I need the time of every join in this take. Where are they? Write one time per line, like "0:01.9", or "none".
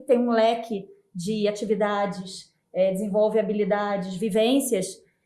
none